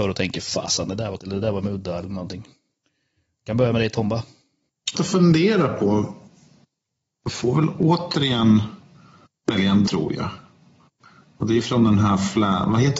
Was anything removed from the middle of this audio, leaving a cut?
yes; 3 cuts; at 1.2 s, 4.9 s, 9.9 s

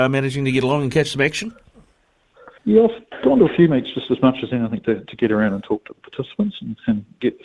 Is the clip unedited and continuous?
no; 1 cut; at 2.6 s

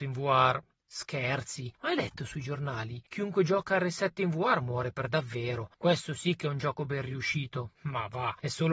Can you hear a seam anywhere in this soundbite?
no; 0 cuts

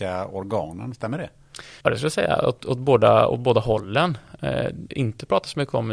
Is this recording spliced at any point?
yes; 2 cuts; at 1.8 s, 4.9 s

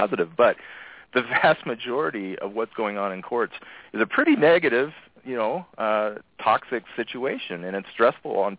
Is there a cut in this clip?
no; 0 cuts

